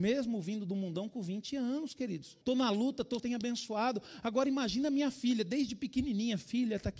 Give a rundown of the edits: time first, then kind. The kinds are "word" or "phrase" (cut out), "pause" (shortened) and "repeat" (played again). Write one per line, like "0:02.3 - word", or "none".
0:02.4 - pause
0:03.2 - phrase